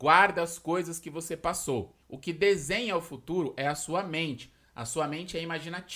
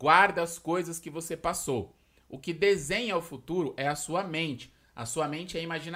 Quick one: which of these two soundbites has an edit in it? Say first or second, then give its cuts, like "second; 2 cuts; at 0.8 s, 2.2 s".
first; 1 cut; at 2.0 s